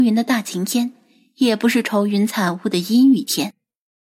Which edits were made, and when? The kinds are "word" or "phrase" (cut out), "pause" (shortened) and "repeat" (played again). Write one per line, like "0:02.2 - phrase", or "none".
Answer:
none